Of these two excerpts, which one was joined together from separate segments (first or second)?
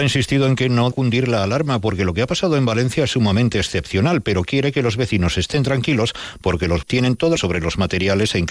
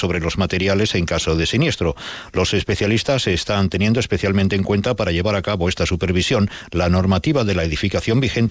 first